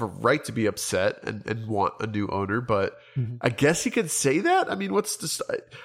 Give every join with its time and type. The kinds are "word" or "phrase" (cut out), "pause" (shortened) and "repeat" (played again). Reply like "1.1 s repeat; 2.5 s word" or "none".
none